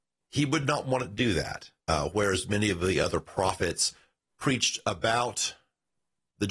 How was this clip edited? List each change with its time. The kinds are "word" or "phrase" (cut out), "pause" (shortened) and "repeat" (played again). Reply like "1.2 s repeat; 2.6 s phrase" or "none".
1.8 s pause